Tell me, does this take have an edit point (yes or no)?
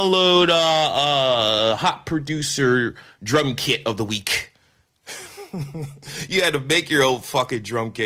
no